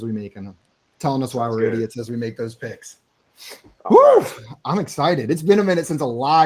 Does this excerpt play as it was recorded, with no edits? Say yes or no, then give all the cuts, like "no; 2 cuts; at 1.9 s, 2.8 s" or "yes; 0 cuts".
yes; 0 cuts